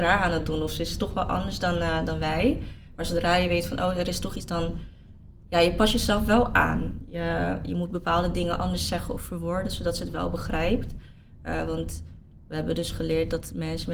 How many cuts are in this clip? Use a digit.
0